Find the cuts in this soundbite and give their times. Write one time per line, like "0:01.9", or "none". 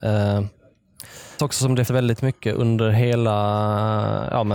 0:01.4
0:01.9